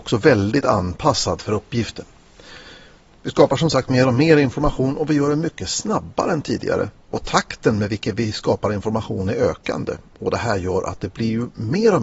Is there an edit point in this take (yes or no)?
no